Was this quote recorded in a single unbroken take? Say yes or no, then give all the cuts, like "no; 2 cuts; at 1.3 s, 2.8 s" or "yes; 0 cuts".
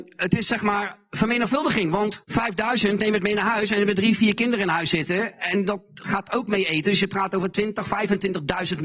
no; 1 cut; at 2.2 s